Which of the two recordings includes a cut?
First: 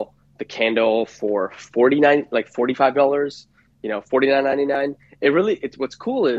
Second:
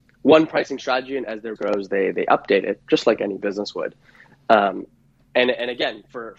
second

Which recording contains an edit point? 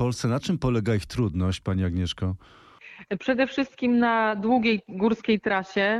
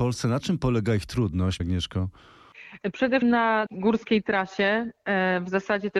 second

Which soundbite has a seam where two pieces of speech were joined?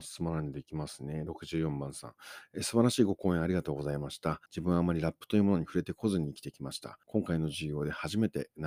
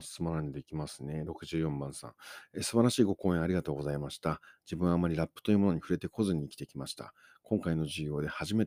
first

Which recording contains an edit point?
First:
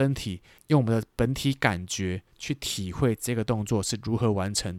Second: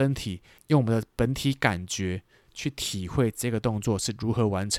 first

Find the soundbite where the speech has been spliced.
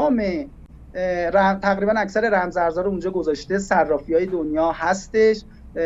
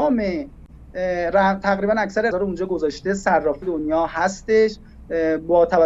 second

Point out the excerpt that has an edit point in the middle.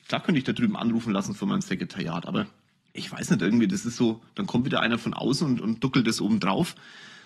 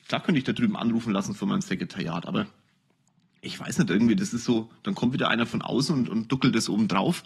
first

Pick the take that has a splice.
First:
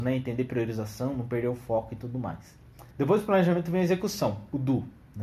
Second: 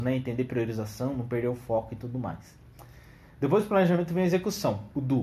first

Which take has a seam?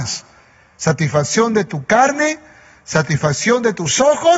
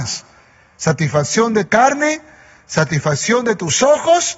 second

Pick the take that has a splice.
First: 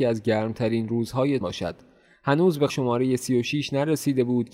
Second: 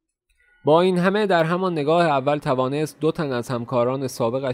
first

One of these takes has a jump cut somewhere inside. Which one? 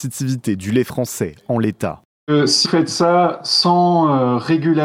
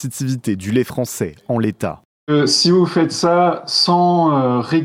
first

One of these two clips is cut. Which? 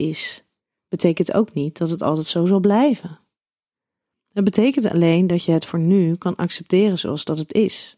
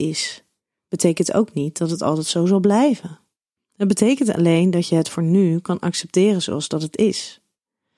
second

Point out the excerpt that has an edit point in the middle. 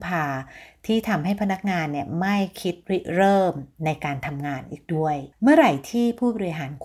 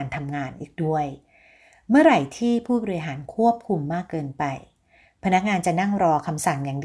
first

